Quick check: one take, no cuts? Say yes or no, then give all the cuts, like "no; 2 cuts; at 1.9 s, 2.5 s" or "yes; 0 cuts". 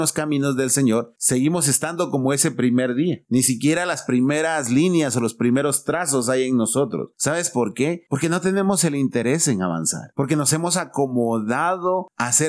yes; 0 cuts